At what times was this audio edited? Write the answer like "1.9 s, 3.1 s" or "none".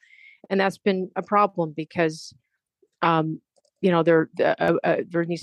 none